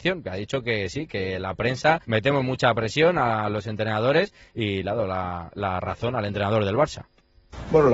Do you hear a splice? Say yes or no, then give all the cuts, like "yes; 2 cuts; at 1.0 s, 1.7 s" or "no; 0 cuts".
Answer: yes; 1 cut; at 2.0 s